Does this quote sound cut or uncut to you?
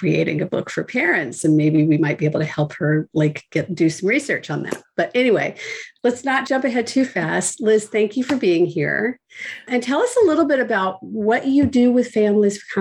uncut